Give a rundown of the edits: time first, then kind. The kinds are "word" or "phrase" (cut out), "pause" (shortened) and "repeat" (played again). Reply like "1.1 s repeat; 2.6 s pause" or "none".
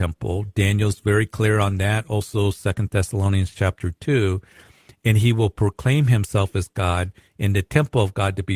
none